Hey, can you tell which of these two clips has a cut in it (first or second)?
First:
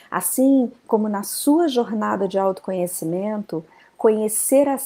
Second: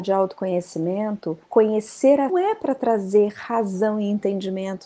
second